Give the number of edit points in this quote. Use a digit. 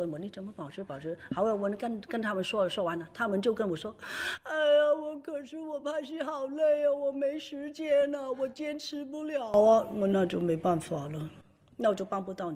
0